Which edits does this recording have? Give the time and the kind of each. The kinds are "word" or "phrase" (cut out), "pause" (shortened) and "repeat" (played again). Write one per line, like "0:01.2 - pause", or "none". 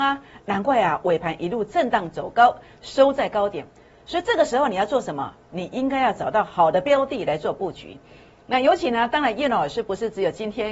none